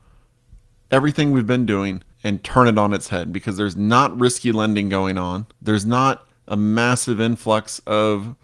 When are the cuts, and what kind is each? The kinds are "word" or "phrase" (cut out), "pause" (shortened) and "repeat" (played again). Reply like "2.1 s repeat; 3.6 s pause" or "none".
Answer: 2.1 s pause; 5.5 s pause